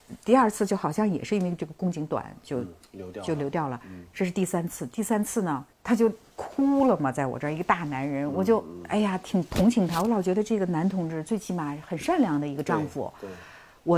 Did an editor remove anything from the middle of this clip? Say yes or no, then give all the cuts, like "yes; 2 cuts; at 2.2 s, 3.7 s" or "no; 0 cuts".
yes; 1 cut; at 5.7 s